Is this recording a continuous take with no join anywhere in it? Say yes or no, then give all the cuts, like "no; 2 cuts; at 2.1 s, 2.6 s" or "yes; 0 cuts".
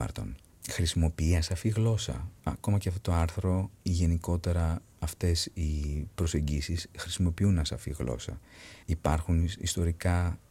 no; 2 cuts; at 2.4 s, 8.8 s